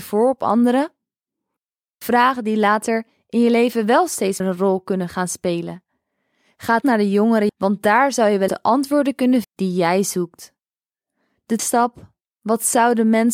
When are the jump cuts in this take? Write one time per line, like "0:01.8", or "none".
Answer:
0:04.4
0:06.8
0:07.5
0:08.5
0:09.4
0:11.6